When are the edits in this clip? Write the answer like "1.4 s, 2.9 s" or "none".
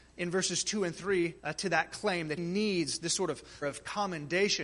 1.4 s, 2.4 s, 3.6 s